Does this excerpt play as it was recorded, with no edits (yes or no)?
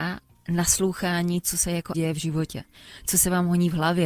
no